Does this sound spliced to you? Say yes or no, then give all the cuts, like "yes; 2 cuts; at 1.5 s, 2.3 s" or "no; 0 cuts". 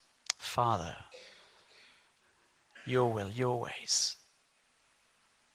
no; 0 cuts